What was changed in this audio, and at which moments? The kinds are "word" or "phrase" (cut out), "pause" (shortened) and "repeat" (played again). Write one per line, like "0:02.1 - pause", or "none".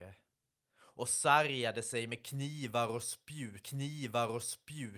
0:03.6 - repeat